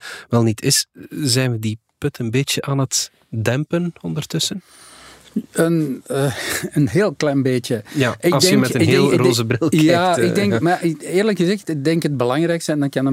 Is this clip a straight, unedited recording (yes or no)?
yes